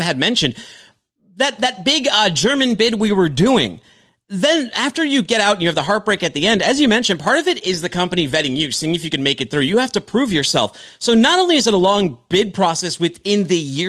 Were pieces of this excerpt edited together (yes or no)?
no